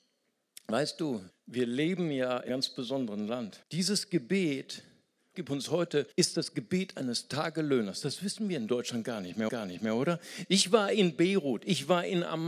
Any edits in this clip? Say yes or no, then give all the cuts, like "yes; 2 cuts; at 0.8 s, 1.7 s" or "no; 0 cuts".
yes; 6 cuts; at 1.3 s, 2.5 s, 3.6 s, 5.3 s, 6.1 s, 9.5 s